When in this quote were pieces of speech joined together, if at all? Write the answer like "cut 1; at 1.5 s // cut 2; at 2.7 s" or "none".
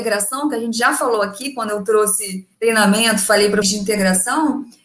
cut 1; at 2.5 s // cut 2; at 3.6 s